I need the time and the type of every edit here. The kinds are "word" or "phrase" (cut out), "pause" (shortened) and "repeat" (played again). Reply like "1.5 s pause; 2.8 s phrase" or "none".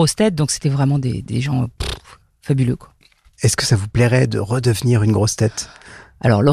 1.2 s word